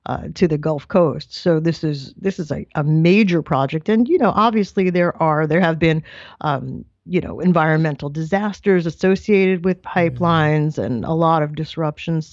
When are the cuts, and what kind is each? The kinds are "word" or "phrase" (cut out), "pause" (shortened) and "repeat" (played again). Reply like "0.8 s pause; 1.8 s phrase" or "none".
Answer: none